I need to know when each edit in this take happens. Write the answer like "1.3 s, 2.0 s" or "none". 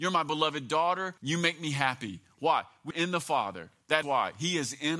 1.2 s, 2.9 s, 4.0 s